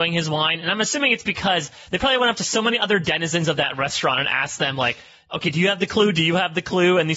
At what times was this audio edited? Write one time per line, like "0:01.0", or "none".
none